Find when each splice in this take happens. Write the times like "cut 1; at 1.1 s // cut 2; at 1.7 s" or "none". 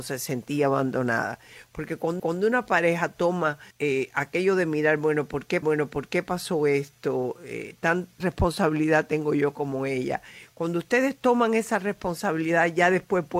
cut 1; at 2.2 s // cut 2; at 3.7 s // cut 3; at 5.6 s // cut 4; at 8.2 s